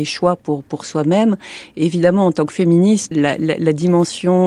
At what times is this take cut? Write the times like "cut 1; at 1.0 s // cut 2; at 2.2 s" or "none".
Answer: cut 1; at 3.1 s